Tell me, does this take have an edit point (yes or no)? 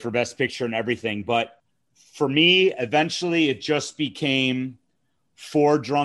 no